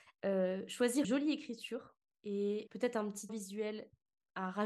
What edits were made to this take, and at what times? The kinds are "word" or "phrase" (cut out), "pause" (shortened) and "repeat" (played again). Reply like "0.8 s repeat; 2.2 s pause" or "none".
1.0 s word; 2.7 s word; 3.3 s word